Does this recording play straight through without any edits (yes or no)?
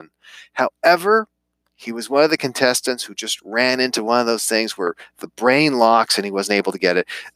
yes